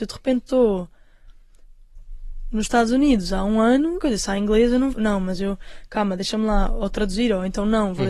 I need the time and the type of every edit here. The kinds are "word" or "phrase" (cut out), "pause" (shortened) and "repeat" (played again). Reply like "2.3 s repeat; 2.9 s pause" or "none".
4.0 s phrase; 4.9 s phrase

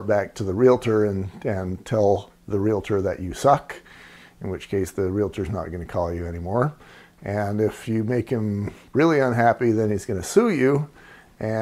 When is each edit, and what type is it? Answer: none

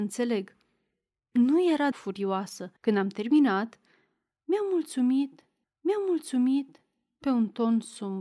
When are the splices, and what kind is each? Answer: 1.9 s word; 2.8 s pause; 5.6 s repeat

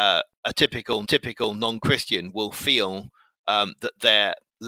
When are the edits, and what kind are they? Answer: 1.1 s repeat

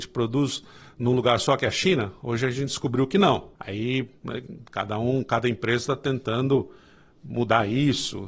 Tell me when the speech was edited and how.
3.6 s pause

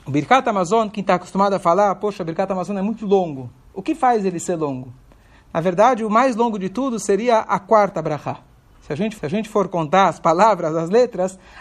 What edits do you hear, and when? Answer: 9.2 s repeat

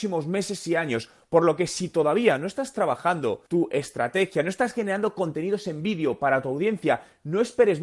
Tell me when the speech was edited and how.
3.5 s pause

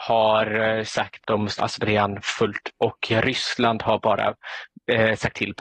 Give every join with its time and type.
1.2 s word; 1.6 s word; 2.7 s word

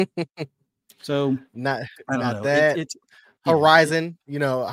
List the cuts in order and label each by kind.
none

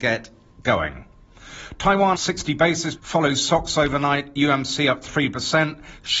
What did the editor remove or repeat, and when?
2.1 s word; 3.0 s word

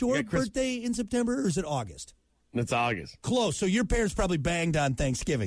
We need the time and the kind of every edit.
none

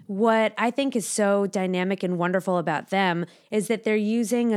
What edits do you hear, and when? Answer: none

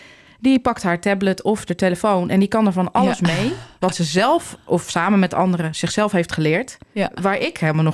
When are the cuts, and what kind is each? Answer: none

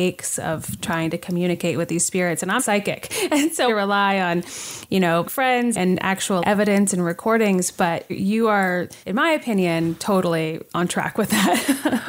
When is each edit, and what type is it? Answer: 2.6 s word; 3.7 s phrase; 5.2 s phrase; 5.7 s word; 6.4 s word; 8.1 s word; 9.0 s pause

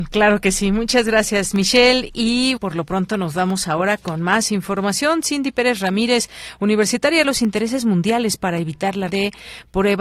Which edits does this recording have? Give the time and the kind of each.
2.6 s word; 7.2 s word; 9.1 s word

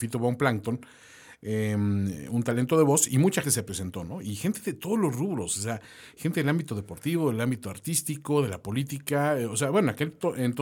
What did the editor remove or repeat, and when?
3.4 s word

